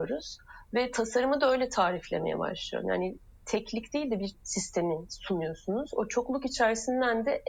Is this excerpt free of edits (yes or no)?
no